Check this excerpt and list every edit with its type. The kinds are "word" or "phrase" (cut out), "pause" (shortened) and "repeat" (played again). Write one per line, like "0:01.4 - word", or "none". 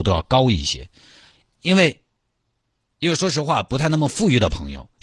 none